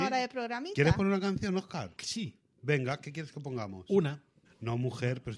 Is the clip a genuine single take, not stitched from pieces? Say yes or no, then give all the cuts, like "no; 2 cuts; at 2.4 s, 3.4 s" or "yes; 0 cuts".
no; 1 cut; at 4.4 s